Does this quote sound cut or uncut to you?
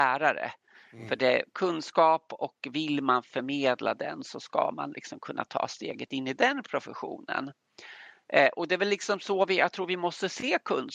uncut